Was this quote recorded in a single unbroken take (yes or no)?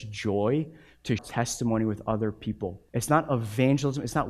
no